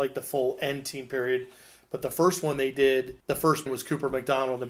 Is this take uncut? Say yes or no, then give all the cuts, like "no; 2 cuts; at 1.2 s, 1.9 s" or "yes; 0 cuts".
no; 2 cuts; at 3.2 s, 3.7 s